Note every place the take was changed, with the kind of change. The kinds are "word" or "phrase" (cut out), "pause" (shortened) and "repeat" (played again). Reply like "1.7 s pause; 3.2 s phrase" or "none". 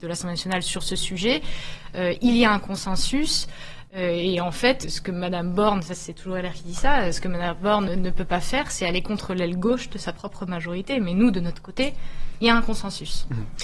4.8 s word; 7.9 s word